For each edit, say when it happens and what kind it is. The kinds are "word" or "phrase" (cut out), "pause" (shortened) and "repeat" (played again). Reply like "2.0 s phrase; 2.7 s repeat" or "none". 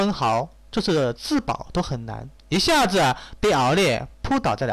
2.4 s pause